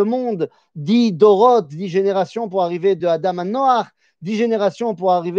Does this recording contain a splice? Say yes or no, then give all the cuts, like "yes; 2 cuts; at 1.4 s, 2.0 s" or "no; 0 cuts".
no; 0 cuts